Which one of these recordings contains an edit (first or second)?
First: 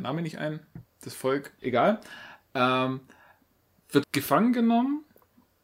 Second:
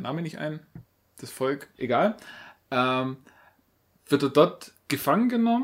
first